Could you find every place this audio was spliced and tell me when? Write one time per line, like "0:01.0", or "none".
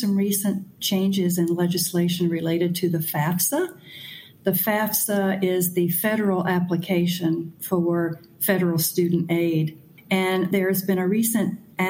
none